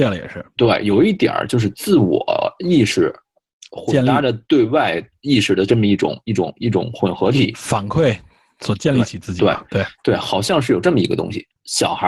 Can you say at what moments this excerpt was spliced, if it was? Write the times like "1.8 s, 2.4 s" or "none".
none